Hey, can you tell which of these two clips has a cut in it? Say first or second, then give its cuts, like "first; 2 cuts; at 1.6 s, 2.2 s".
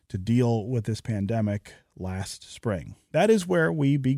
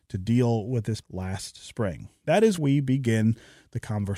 second; 2 cuts; at 1.0 s, 2.6 s